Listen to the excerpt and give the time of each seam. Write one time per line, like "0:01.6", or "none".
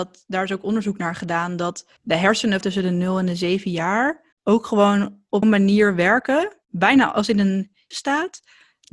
0:02.0
0:02.6
0:04.3
0:05.4
0:06.6
0:07.9